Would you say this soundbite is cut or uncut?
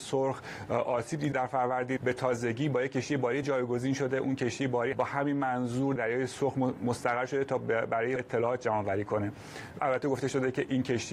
cut